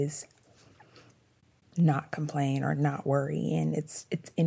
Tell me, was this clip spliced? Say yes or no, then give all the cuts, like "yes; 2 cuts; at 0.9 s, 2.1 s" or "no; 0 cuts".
no; 0 cuts